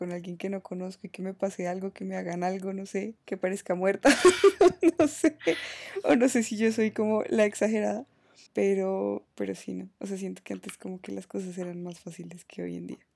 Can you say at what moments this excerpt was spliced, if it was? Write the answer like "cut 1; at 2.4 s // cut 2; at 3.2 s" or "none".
cut 1; at 3.2 s // cut 2; at 8.5 s

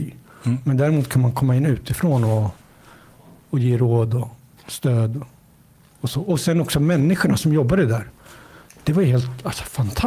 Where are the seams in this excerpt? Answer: none

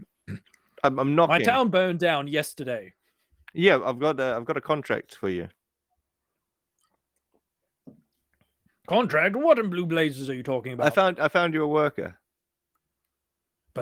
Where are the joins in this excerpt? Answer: none

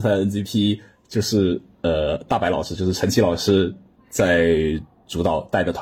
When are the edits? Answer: none

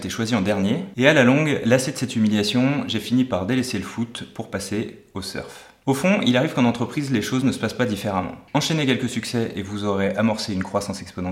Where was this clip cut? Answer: none

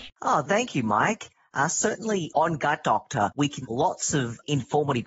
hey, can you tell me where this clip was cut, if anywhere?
cut 1; at 3.6 s

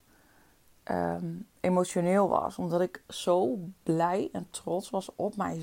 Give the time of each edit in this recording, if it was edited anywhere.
none

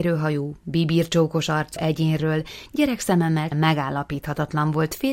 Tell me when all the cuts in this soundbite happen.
cut 1; at 1.8 s // cut 2; at 3.5 s

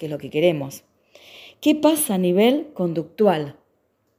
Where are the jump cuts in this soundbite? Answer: cut 1; at 2.1 s

